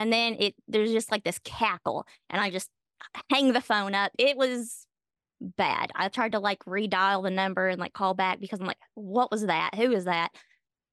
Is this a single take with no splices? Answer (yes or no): yes